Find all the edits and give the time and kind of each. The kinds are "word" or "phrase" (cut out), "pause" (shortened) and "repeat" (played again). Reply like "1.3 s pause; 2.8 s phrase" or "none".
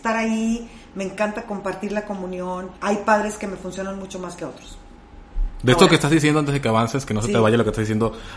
2.8 s pause